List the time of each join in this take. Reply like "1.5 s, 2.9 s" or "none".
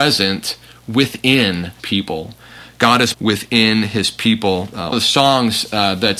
1.8 s, 3.1 s, 4.9 s